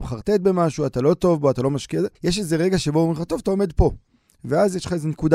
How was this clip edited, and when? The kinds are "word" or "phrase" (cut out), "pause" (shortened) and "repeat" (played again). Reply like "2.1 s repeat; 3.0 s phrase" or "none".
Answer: 2.1 s pause